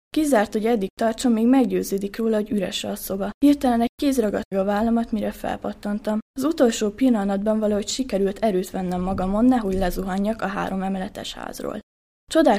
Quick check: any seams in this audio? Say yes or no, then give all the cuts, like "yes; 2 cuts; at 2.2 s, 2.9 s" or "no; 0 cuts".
yes; 3 cuts; at 3.4 s, 4.5 s, 6.3 s